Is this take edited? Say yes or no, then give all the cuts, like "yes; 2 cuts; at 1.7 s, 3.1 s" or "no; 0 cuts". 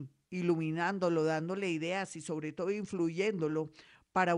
no; 0 cuts